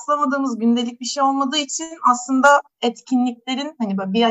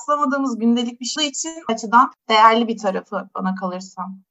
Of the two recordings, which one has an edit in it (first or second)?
second